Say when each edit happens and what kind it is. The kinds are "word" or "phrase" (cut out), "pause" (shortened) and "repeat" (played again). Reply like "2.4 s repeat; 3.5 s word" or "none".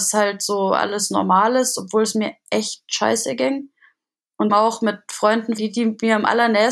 4.5 s word; 5.6 s word